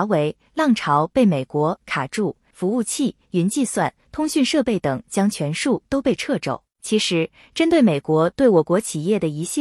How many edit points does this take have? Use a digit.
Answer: 2